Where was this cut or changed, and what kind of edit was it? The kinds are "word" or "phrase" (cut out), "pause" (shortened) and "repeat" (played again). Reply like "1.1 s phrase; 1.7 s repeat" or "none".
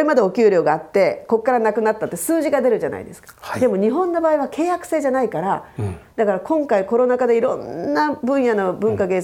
none